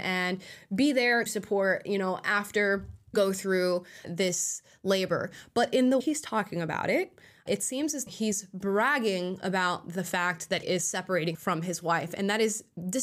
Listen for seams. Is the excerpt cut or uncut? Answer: cut